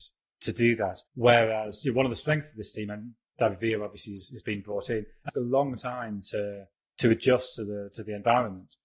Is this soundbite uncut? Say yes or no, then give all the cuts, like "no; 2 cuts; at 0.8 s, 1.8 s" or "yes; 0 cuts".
no; 3 cuts; at 1.1 s, 5.3 s, 6.7 s